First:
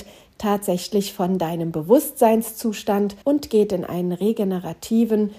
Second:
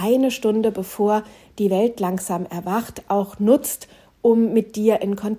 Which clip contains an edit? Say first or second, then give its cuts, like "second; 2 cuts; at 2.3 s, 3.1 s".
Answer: first; 1 cut; at 3.2 s